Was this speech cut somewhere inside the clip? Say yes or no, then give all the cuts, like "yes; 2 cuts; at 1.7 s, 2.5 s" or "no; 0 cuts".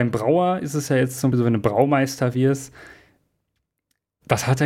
yes; 1 cut; at 1.3 s